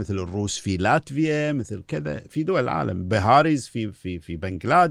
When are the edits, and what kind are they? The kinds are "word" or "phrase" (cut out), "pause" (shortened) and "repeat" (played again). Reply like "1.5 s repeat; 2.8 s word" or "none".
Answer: none